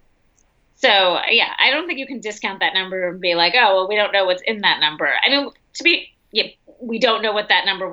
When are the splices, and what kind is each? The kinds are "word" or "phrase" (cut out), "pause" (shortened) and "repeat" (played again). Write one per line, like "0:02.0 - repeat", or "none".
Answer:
none

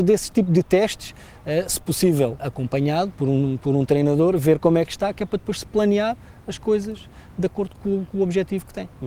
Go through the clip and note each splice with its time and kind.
0:02.4 - word
0:07.8 - word

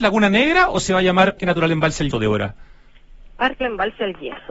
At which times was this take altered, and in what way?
0:01.4 - word
0:02.1 - word
0:03.6 - word

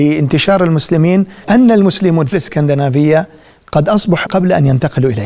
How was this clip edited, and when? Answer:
0:01.4 - word
0:02.3 - word
0:04.2 - word

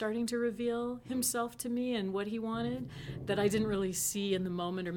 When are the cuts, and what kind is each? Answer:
none

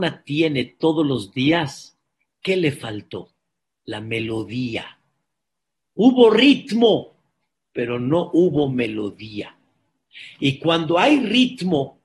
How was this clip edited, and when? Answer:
none

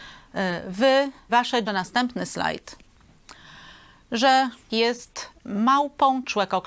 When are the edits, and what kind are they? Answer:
0:01.3 - word
0:01.7 - phrase
0:04.7 - word

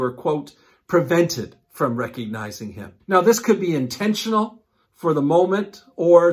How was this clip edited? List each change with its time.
0:03.0 - pause
0:04.8 - pause

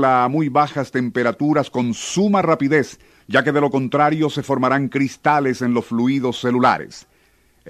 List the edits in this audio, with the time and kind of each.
none

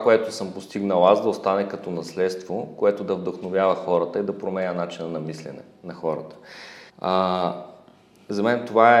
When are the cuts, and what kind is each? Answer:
0:06.9 - pause

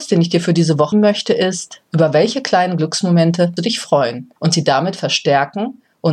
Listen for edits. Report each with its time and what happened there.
0:00.9 - word
0:01.9 - pause
0:03.6 - word
0:04.4 - pause

